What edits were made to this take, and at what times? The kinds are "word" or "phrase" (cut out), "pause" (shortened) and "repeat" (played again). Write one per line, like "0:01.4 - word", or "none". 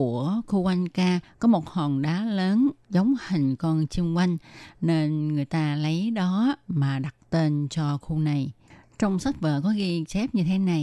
none